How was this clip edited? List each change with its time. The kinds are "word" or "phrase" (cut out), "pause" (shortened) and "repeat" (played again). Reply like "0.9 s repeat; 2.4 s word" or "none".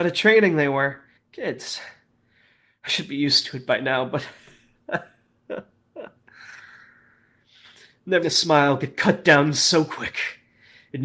1.2 s pause; 8.2 s word